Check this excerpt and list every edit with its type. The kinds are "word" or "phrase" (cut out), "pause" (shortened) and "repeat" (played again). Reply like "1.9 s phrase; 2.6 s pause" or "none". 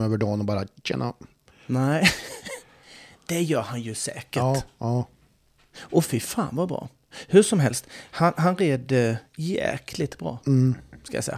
none